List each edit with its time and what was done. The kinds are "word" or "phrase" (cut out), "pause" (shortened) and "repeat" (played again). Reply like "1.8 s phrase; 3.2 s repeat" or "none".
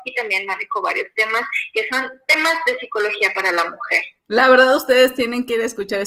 4.2 s pause